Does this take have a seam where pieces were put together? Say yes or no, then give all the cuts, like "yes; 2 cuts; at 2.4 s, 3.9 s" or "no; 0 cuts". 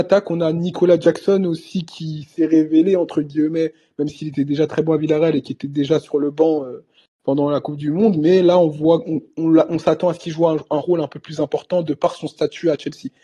no; 0 cuts